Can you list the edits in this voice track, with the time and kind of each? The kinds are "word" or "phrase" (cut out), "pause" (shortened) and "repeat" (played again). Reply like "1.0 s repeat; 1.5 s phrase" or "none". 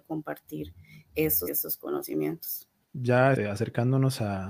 1.5 s word; 3.3 s word